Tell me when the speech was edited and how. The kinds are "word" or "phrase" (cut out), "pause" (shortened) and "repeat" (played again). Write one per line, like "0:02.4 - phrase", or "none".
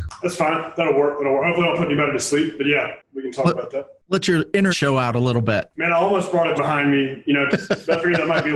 0:04.7 - word
0:06.6 - word
0:07.5 - word